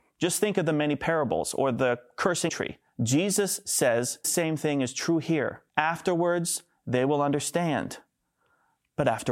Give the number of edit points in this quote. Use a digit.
4